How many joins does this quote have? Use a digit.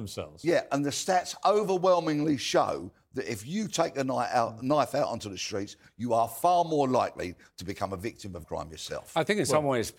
1